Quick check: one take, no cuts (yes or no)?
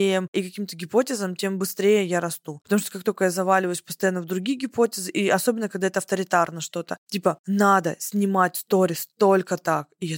yes